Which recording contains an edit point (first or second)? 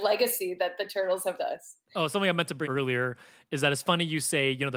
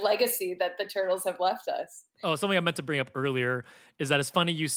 first